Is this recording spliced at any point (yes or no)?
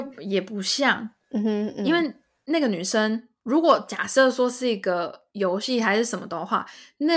yes